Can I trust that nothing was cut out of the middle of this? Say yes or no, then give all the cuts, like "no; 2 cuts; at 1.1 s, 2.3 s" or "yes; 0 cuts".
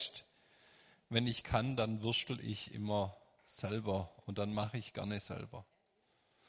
yes; 0 cuts